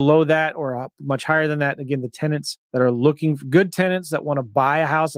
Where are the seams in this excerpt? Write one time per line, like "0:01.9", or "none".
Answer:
none